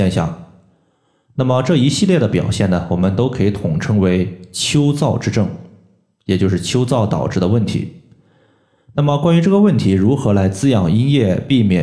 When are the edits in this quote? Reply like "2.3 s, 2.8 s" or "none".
none